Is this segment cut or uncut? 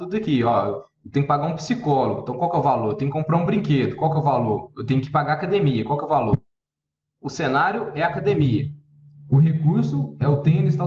uncut